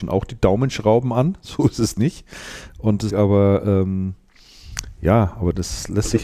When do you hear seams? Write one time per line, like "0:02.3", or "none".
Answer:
0:03.1